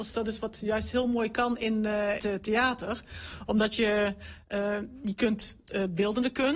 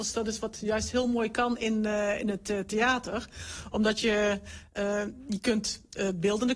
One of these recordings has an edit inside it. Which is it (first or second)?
first